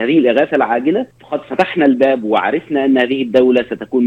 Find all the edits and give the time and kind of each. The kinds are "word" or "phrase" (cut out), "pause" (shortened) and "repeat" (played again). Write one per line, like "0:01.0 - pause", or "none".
0:01.1 - pause